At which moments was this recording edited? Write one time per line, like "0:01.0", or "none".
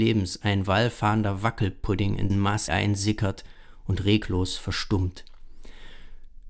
0:02.3
0:02.7